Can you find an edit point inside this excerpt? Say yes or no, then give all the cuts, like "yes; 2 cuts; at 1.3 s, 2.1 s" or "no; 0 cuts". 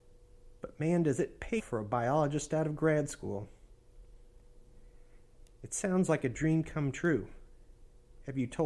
yes; 1 cut; at 1.6 s